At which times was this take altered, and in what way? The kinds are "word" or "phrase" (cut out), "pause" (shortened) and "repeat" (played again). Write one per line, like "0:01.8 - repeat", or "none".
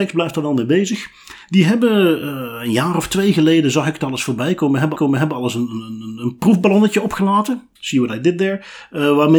0:05.0 - repeat
0:07.8 - pause